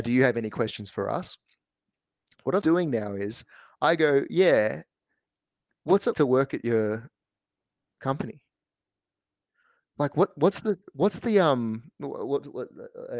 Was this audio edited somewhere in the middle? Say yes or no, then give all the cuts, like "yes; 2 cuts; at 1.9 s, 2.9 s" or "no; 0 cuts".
yes; 2 cuts; at 2.6 s, 6.1 s